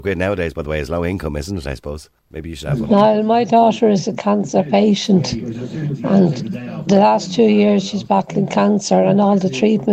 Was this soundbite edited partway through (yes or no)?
yes